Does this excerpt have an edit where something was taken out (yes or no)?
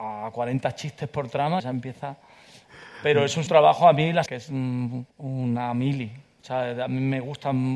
yes